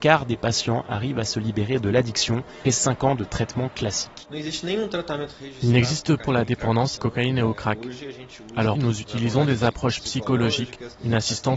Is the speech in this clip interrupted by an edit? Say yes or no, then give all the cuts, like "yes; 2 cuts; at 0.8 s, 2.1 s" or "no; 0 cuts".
yes; 4 cuts; at 2.7 s, 6.2 s, 7.0 s, 8.8 s